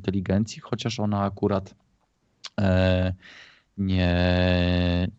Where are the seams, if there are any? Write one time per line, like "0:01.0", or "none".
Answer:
none